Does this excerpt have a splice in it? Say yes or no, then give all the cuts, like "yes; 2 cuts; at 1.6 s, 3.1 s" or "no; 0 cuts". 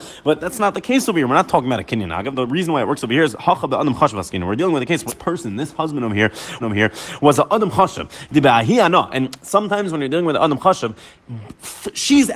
yes; 2 cuts; at 5.1 s, 6.6 s